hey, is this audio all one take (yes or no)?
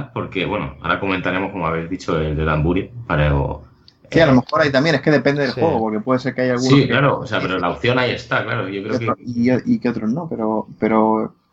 yes